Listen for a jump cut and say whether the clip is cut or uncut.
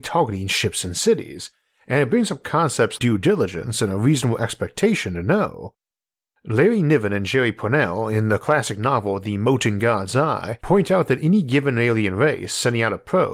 cut